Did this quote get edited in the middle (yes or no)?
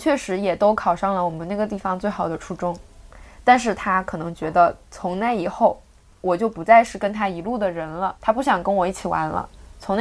yes